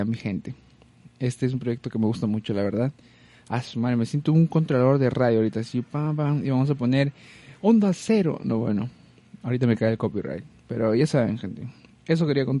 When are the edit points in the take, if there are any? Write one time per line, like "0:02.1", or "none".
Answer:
none